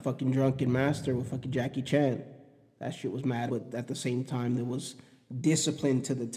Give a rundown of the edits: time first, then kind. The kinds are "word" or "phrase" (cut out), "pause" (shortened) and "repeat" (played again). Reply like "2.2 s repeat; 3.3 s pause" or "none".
3.5 s word